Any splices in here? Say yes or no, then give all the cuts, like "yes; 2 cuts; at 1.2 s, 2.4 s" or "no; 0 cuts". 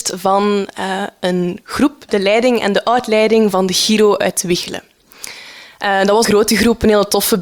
yes; 1 cut; at 6.2 s